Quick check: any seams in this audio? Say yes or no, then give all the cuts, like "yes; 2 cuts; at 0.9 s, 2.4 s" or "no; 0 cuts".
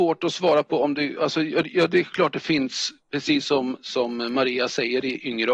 no; 0 cuts